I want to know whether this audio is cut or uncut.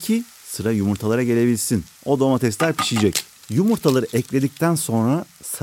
uncut